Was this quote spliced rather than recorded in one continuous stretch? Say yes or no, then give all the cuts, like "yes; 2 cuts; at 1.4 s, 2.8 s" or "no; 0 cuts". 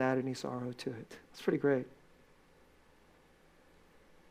yes; 1 cut; at 1.2 s